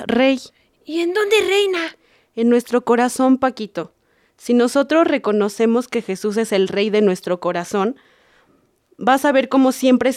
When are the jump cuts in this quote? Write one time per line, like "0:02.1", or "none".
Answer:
none